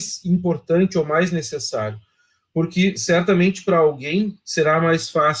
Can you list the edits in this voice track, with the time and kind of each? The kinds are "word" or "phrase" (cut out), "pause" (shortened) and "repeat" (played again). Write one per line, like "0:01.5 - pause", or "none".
none

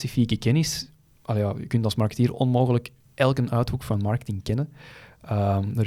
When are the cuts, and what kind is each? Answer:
none

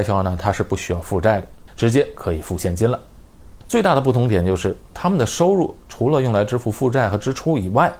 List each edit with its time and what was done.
0:03.6 - pause

